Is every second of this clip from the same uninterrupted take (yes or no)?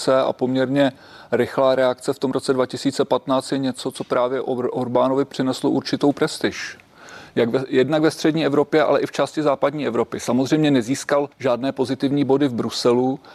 no